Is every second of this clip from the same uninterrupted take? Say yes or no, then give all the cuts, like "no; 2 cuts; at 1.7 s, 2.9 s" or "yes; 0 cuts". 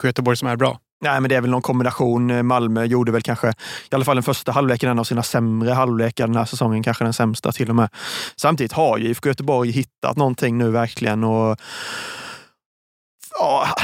yes; 0 cuts